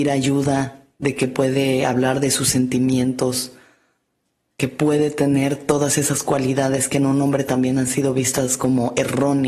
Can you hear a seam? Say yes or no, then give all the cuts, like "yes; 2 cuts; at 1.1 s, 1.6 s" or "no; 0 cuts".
no; 0 cuts